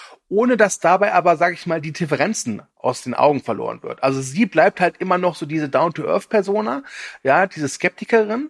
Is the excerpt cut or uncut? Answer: uncut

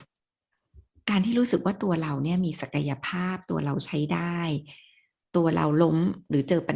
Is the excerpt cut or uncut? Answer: uncut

